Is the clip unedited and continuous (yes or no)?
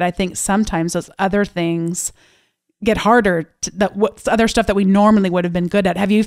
yes